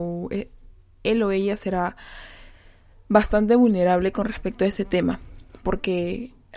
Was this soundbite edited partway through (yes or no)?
no